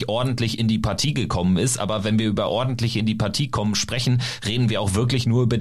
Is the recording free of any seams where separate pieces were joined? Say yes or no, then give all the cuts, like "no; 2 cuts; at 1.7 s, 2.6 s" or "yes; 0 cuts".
yes; 0 cuts